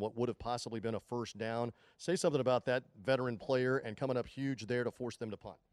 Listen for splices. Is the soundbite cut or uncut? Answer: uncut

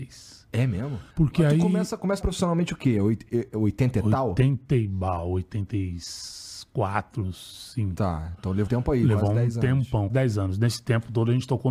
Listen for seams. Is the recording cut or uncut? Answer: cut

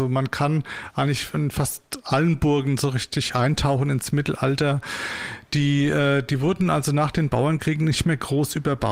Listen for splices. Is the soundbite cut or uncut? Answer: uncut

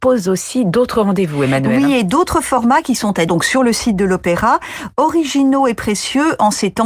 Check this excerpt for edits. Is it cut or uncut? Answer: cut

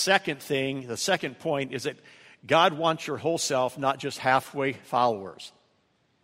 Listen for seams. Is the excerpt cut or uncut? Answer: uncut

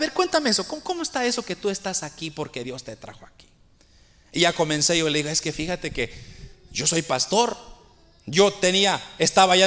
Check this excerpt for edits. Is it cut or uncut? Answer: uncut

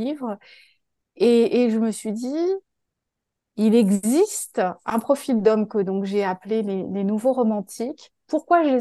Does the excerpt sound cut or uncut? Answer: uncut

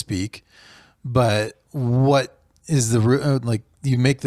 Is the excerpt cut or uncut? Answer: uncut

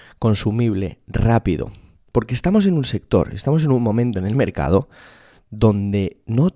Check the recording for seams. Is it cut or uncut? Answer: uncut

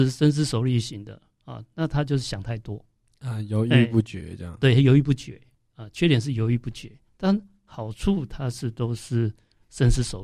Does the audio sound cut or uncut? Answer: uncut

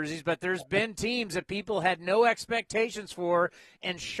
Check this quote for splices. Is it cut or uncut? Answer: uncut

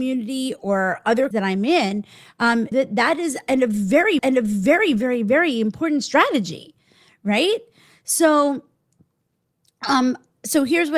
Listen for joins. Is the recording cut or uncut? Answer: cut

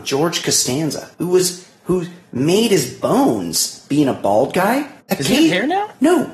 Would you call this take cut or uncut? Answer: cut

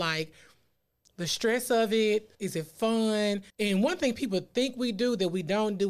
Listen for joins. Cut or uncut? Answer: cut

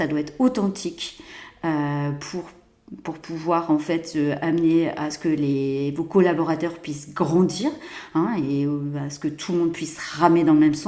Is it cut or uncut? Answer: uncut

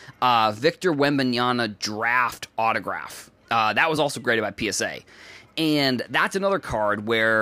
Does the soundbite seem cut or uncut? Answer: uncut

